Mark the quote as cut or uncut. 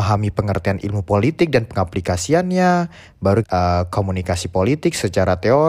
cut